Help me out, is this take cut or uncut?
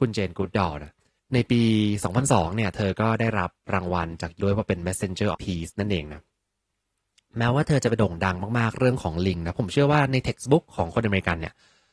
cut